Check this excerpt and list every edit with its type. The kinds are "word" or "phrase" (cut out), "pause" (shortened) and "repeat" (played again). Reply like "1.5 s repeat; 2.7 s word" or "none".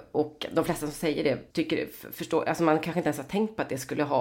1.5 s pause